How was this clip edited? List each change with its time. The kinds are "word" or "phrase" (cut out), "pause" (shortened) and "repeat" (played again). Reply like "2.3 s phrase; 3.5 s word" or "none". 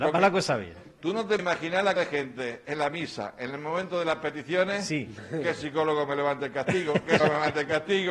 1.4 s word; 2.0 s word; 7.2 s word